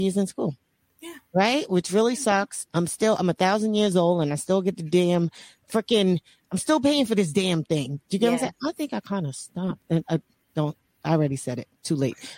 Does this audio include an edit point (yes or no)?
no